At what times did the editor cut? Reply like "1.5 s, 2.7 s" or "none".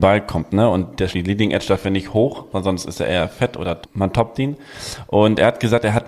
1.1 s, 3.8 s